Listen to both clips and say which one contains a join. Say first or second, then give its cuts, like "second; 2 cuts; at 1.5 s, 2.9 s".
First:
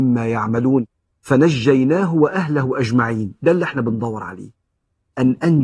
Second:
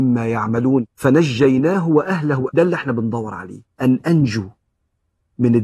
second; 3 cuts; at 0.9 s, 2.5 s, 3.7 s